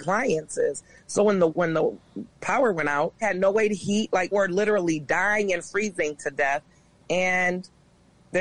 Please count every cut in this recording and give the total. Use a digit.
3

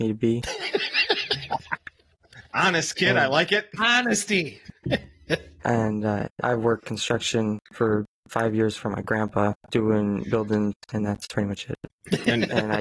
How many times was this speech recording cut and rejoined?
3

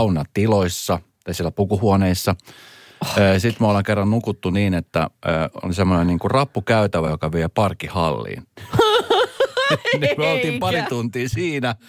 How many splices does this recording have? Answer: 0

